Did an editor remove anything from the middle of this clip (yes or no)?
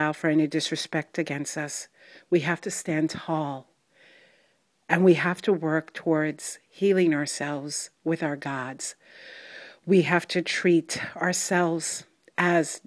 no